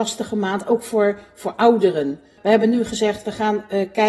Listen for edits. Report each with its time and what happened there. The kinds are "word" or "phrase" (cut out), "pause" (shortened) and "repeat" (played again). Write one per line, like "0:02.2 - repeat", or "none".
none